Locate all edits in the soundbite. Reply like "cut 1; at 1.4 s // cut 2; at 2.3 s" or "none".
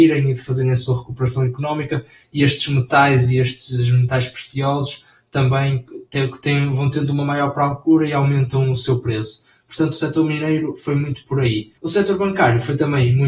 cut 1; at 11.8 s